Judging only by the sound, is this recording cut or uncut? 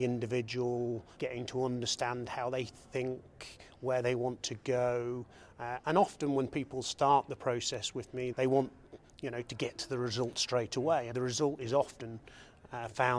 cut